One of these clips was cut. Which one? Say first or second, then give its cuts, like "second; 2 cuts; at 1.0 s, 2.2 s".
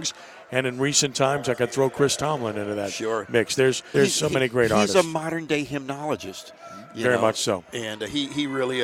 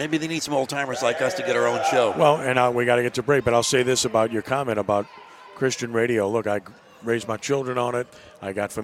first; 1 cut; at 3.9 s